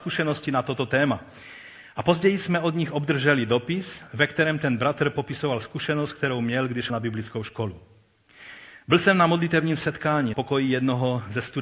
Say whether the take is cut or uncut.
cut